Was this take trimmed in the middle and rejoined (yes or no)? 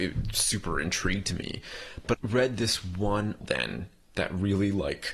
yes